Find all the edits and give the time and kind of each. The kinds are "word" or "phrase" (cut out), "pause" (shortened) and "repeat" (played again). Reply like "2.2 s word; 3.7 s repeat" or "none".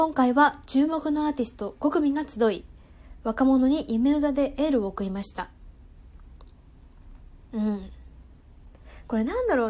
7.4 s pause